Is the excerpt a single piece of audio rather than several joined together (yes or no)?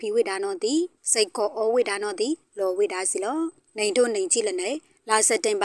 yes